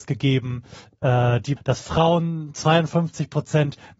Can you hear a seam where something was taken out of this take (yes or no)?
yes